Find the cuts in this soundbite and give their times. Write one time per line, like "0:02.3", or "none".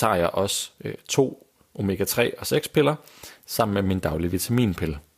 none